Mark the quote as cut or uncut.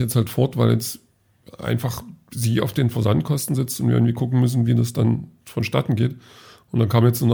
uncut